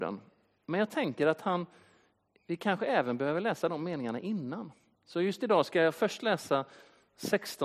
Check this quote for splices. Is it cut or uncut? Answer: uncut